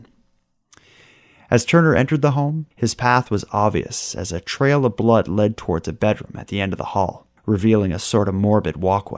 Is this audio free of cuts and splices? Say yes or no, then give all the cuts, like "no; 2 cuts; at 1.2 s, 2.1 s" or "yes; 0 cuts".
no; 2 cuts; at 2.7 s, 7.4 s